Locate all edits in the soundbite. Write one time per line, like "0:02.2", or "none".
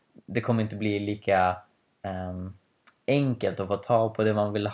none